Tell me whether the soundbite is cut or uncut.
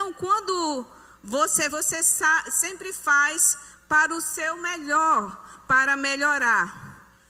cut